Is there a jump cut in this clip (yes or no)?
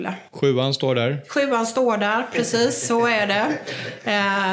no